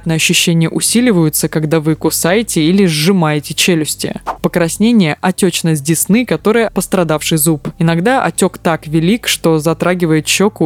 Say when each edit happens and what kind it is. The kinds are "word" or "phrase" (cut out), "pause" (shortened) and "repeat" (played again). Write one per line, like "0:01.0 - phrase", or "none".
0:06.7 - word